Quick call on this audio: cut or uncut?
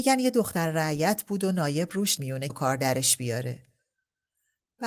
cut